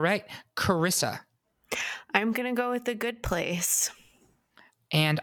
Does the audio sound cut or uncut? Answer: uncut